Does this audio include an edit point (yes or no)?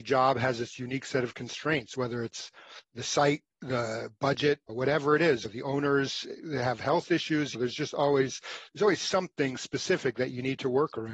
yes